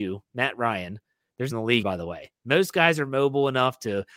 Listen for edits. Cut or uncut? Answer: cut